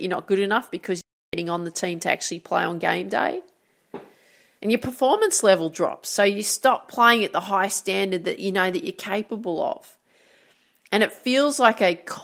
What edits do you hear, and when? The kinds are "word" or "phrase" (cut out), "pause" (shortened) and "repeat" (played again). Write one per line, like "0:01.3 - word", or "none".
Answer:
none